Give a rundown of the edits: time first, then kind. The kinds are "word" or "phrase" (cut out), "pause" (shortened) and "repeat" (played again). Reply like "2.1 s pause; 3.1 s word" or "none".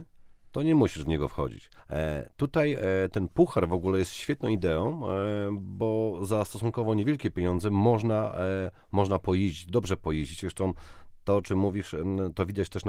1.8 s pause